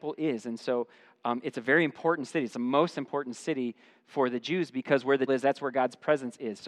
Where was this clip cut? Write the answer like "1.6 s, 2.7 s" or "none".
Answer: 5.3 s